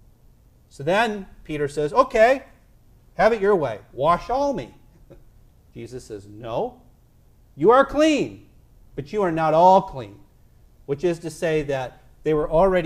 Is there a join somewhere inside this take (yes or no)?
no